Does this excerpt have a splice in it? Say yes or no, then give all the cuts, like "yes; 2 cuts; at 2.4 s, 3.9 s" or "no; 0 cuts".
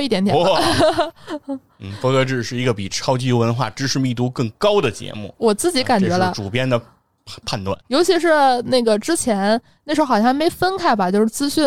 yes; 1 cut; at 7.8 s